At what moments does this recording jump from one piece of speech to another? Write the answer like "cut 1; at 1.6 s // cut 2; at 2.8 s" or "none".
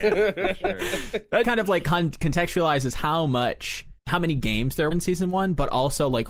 cut 1; at 1.4 s // cut 2; at 4.0 s // cut 3; at 4.9 s